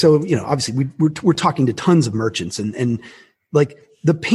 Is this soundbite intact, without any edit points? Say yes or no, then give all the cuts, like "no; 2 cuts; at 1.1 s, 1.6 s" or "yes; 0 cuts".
yes; 0 cuts